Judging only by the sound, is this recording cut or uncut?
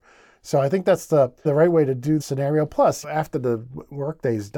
cut